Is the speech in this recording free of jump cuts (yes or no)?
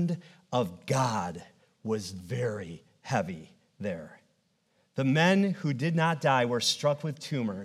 yes